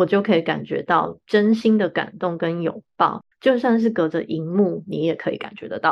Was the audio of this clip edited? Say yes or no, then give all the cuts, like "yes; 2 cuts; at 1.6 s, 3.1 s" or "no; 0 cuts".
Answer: yes; 1 cut; at 3.3 s